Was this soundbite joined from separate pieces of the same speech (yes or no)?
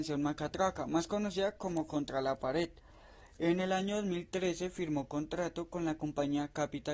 no